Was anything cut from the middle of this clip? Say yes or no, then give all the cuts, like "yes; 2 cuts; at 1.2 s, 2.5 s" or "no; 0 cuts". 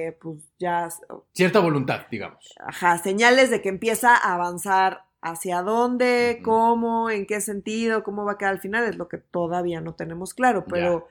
no; 0 cuts